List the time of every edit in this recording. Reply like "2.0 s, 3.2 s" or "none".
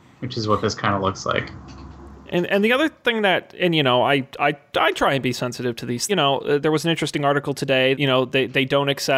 4.3 s, 6.1 s, 7.9 s

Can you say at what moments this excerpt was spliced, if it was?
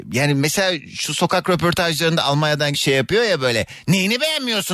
2.7 s

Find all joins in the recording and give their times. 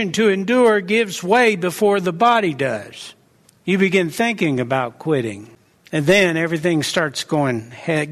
none

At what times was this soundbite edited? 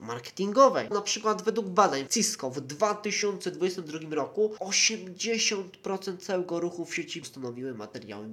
0.9 s, 2.1 s, 7.2 s

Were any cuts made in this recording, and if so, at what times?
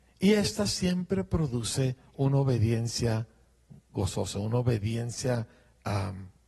none

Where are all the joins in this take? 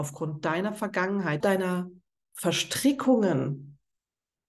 1.4 s

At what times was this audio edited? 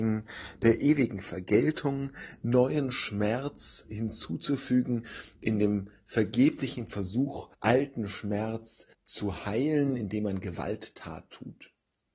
7.5 s, 8.9 s

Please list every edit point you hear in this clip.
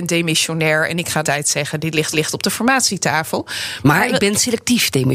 1.2 s, 2.1 s

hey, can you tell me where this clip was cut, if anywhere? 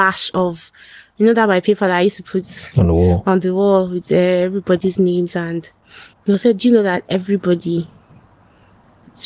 6.1 s

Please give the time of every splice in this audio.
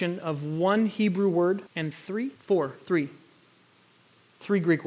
1.7 s, 2.4 s

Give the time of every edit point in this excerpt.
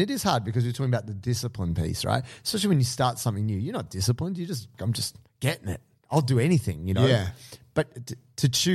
5.3 s

